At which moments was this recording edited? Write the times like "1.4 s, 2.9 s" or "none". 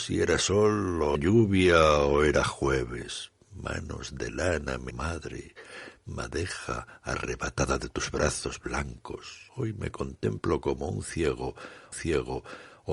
1.1 s, 4.9 s, 9.5 s, 11.9 s